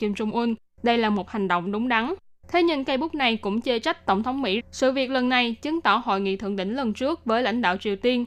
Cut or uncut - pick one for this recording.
cut